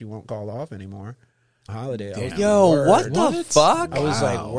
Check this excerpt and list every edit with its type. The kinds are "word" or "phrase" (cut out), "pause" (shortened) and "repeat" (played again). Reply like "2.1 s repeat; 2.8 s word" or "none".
1.7 s word; 2.3 s word